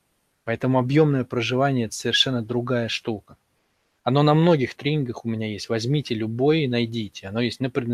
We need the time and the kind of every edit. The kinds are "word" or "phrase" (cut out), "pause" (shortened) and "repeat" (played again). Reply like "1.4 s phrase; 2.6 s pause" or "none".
none